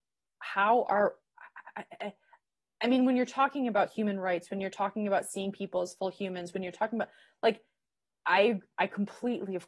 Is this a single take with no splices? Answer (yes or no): yes